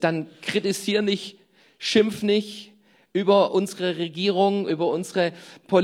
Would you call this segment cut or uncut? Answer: uncut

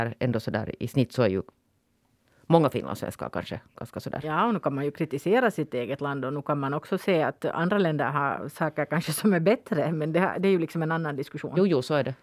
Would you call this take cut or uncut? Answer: uncut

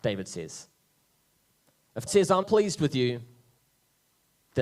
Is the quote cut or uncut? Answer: cut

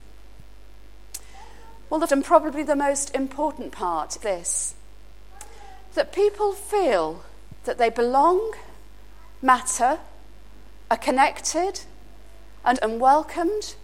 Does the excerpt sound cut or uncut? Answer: cut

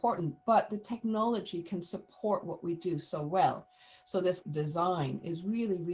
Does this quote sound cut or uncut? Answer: cut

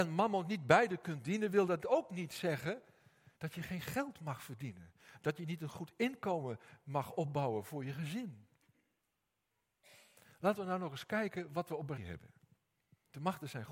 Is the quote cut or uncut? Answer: cut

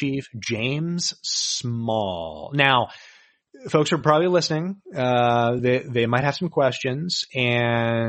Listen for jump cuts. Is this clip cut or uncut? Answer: uncut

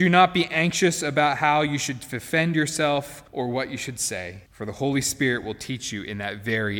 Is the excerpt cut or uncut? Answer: cut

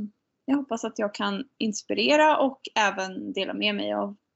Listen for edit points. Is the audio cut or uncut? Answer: uncut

